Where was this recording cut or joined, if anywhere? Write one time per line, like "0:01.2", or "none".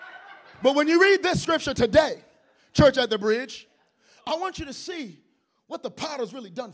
none